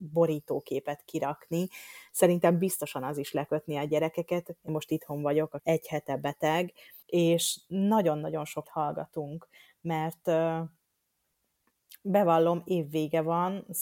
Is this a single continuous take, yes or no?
no